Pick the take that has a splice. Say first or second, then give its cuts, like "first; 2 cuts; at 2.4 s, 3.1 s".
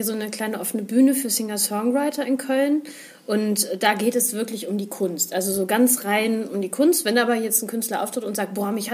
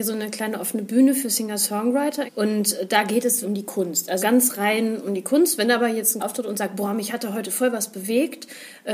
second; 4 cuts; at 2.3 s, 3.4 s, 4.2 s, 6.2 s